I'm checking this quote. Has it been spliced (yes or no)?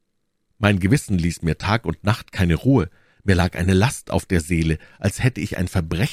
no